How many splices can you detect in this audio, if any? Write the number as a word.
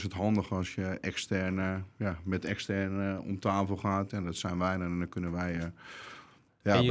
zero